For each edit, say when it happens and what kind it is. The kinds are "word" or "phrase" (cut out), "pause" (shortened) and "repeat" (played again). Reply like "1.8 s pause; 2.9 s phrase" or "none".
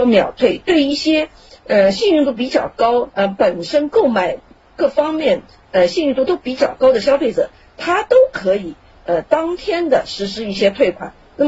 none